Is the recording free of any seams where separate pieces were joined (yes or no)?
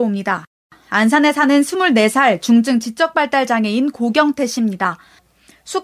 yes